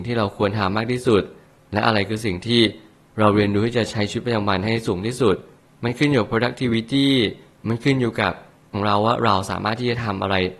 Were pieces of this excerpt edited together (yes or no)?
yes